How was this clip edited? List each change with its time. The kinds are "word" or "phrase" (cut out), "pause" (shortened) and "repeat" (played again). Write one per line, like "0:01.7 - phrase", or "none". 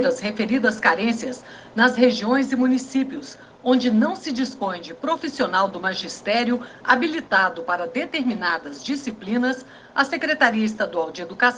none